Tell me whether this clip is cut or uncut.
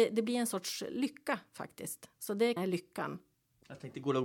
cut